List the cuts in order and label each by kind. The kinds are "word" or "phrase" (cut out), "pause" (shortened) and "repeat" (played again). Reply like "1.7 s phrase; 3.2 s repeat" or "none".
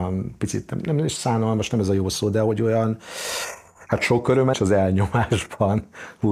4.5 s word